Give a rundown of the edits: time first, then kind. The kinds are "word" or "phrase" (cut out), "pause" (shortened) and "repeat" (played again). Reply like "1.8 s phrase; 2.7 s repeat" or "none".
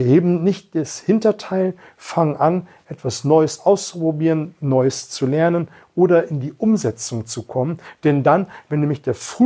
none